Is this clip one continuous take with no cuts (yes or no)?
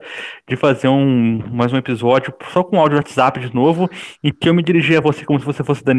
yes